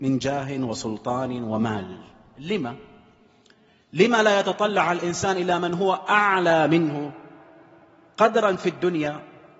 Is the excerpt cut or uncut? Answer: uncut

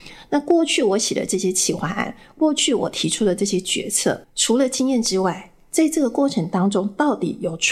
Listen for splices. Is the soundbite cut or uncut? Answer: cut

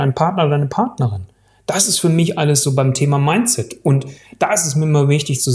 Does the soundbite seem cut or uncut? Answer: uncut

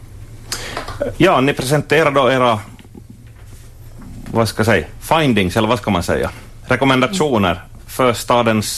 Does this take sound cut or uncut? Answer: uncut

